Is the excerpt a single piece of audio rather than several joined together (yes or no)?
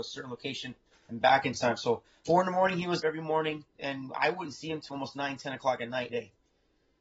no